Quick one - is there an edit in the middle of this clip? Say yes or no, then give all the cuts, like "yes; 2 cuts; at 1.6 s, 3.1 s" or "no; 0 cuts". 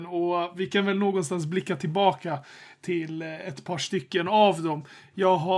no; 0 cuts